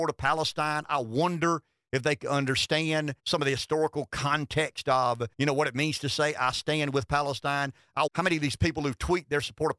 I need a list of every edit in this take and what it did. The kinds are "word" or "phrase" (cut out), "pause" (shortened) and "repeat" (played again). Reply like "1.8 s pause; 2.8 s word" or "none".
3.2 s pause; 5.3 s pause; 8.1 s word